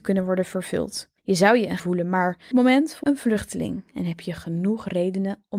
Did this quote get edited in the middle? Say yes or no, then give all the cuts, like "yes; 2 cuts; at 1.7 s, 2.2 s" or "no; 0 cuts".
yes; 4 cuts; at 1.2 s, 1.8 s, 2.5 s, 3.0 s